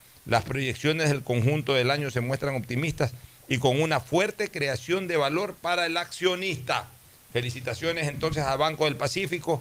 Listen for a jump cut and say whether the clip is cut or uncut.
uncut